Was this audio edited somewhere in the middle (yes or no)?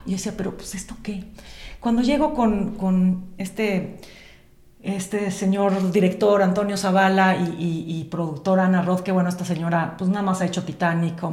no